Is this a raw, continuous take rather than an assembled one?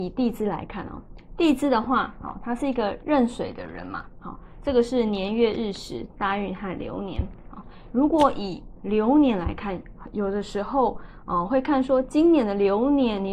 yes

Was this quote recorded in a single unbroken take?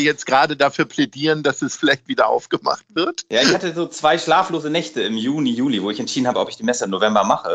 yes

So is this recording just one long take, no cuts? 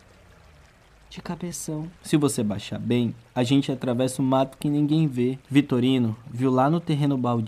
no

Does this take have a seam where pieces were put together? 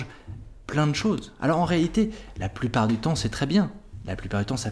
no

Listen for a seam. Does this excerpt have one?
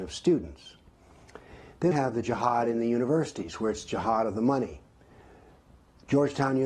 yes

